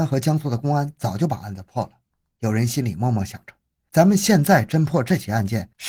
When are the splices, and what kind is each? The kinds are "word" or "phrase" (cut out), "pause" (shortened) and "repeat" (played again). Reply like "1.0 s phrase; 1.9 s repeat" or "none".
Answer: none